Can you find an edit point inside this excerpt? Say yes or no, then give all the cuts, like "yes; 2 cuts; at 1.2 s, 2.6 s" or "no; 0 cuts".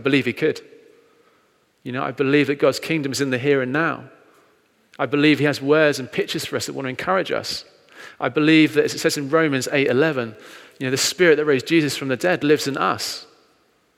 no; 0 cuts